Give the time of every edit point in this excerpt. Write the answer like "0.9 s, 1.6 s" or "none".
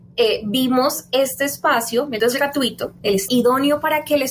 2.2 s, 3.3 s